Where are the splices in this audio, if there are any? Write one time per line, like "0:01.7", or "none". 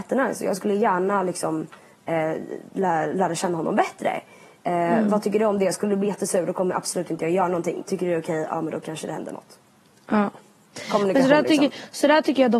none